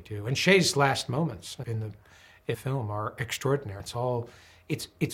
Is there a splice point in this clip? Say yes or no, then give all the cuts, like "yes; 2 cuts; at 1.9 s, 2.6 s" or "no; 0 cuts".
yes; 3 cuts; at 1.6 s, 2.5 s, 3.8 s